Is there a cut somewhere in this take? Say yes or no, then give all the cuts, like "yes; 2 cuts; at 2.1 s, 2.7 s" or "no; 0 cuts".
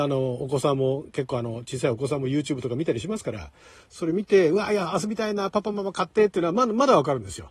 no; 0 cuts